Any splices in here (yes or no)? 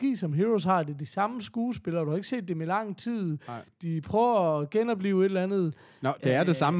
no